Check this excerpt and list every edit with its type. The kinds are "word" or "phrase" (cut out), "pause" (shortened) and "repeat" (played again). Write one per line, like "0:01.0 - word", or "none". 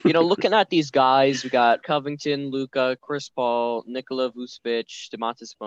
0:01.8 - word